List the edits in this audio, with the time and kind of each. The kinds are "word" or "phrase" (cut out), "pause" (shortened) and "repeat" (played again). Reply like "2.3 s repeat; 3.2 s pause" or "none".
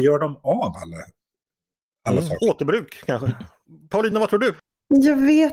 none